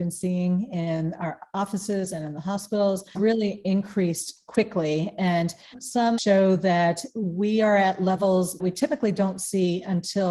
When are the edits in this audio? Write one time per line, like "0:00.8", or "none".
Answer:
0:03.1
0:06.2
0:08.6